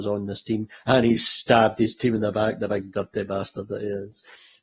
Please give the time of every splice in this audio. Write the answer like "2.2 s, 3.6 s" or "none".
none